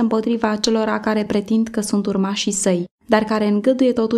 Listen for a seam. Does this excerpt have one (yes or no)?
no